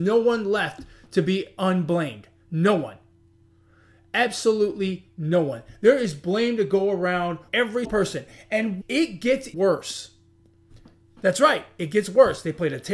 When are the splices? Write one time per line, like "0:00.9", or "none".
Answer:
0:07.5
0:07.8
0:08.8
0:09.5